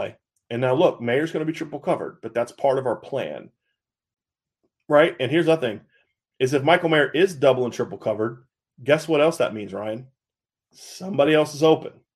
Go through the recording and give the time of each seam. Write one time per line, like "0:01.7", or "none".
none